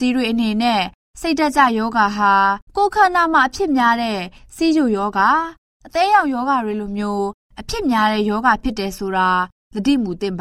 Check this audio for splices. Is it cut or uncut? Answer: cut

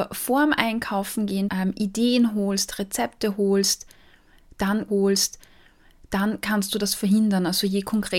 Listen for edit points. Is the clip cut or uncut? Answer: cut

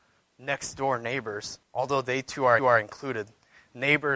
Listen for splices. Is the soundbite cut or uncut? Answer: cut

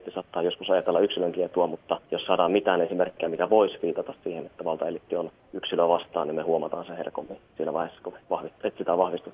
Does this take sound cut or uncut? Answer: cut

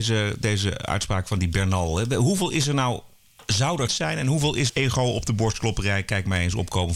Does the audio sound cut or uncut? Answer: cut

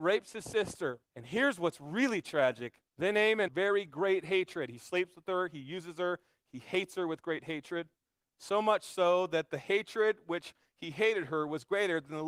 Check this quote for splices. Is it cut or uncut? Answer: cut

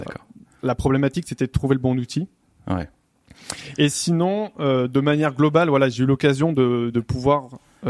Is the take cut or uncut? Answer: cut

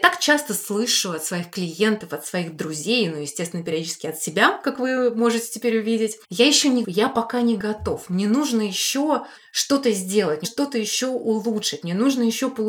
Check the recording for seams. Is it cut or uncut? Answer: cut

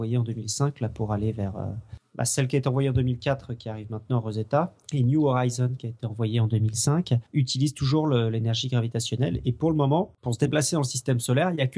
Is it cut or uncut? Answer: cut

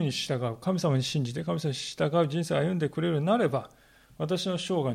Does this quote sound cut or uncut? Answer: uncut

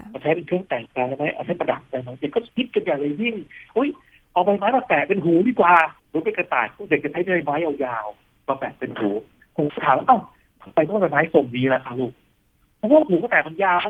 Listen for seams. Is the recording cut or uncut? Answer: cut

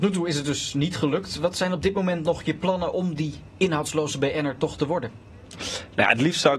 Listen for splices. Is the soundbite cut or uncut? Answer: uncut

